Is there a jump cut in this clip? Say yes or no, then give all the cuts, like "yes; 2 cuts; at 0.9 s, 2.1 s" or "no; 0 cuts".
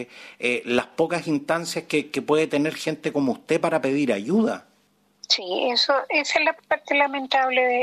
no; 0 cuts